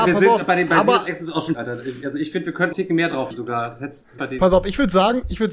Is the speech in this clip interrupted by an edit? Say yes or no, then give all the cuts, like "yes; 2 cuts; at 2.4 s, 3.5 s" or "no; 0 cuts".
yes; 4 cuts; at 1.5 s, 2.7 s, 3.3 s, 4.2 s